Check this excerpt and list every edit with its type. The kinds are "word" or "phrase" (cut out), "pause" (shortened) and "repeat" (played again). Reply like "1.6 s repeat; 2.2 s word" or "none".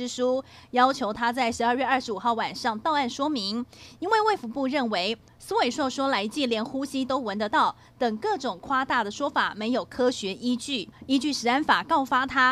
none